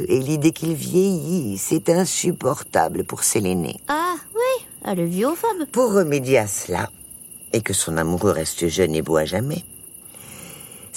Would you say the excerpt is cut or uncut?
uncut